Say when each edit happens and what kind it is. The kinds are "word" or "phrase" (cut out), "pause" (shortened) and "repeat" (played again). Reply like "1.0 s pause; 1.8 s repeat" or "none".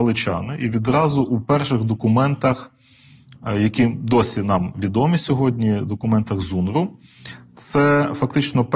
none